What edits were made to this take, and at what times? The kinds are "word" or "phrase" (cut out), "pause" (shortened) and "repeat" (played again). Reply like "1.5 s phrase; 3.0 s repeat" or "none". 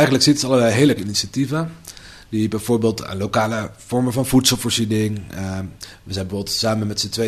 1.0 s word